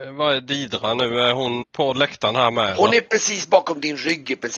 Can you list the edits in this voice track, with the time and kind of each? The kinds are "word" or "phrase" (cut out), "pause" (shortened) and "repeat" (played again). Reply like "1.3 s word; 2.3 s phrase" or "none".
1.6 s word